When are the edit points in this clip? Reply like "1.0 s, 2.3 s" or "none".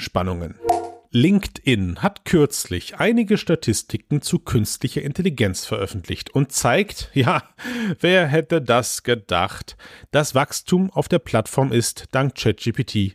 none